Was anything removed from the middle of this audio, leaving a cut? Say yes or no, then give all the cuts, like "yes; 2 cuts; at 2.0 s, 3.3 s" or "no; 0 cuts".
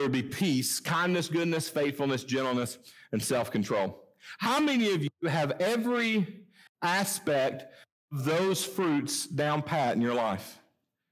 no; 0 cuts